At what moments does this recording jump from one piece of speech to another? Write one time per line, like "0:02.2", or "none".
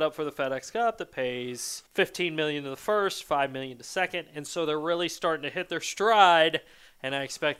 0:01.9

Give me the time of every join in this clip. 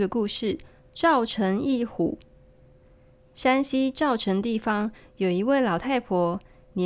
none

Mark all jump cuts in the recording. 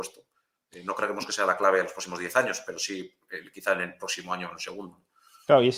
none

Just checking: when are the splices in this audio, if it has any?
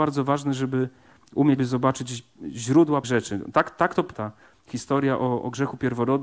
0:01.6
0:03.0
0:04.1

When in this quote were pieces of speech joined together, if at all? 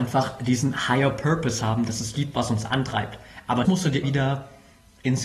0:02.1
0:03.6
0:04.0

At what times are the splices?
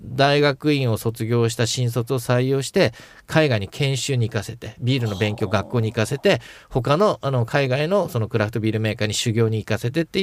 none

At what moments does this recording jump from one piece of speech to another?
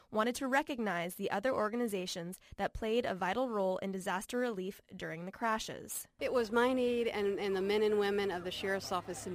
0:06.1

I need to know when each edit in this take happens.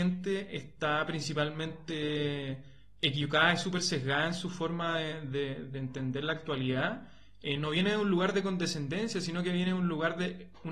none

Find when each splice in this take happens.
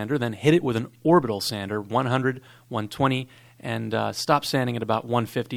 none

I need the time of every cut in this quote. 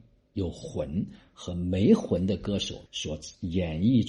0:02.9

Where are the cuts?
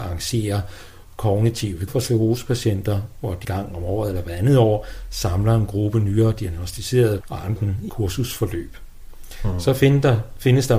0:01.9
0:03.4
0:07.2
0:07.6
0:07.9

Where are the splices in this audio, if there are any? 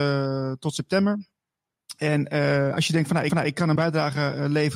0:03.3
0:03.8

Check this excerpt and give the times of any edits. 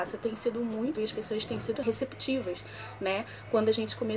0:01.0
0:01.7

